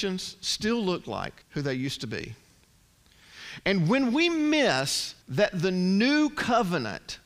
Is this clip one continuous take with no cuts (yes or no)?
no